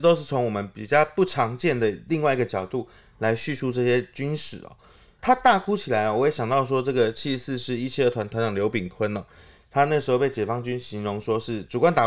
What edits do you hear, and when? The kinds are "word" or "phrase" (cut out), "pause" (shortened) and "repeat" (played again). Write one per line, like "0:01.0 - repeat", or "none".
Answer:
none